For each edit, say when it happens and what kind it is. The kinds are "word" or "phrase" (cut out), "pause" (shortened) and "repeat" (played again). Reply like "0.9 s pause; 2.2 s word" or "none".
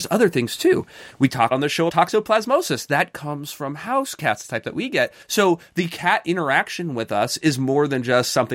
1.5 s phrase; 1.9 s word; 5.2 s pause